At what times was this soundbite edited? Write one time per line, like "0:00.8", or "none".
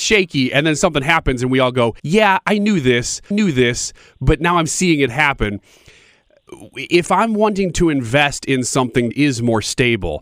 0:02.0
0:03.3
0:09.1